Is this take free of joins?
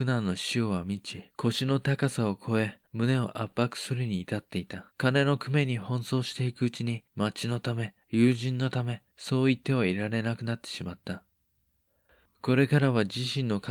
no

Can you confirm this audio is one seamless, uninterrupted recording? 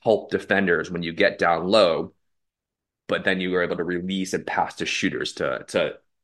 yes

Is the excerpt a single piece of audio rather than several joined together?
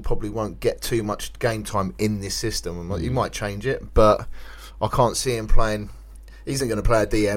yes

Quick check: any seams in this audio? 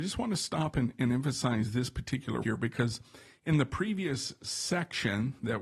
yes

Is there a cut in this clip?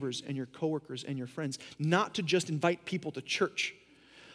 no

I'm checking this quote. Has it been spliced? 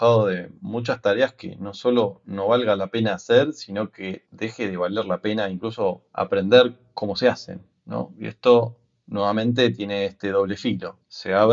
no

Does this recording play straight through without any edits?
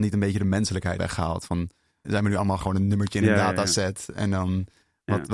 no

